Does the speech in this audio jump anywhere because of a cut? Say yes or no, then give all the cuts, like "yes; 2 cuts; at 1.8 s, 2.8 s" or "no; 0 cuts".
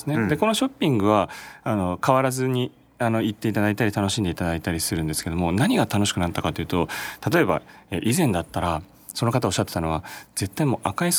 no; 0 cuts